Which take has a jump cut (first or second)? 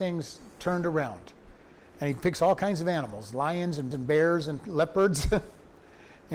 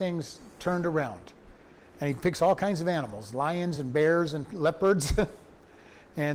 first